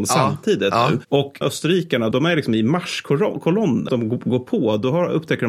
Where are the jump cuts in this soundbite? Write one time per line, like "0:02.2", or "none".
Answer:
0:01.4
0:02.1
0:03.9